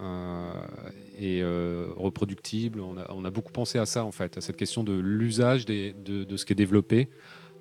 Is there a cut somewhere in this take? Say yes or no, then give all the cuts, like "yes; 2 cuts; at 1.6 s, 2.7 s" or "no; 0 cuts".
no; 0 cuts